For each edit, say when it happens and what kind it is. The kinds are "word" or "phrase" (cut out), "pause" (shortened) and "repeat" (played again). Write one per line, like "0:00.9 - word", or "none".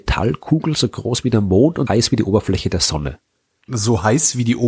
0:01.9 - word